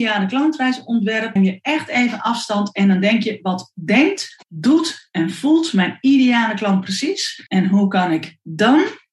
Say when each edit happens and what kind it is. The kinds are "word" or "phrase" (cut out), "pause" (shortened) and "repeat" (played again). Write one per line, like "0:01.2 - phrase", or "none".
0:01.4 - phrase
0:04.4 - pause
0:07.5 - pause